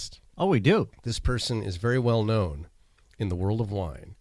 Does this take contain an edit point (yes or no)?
yes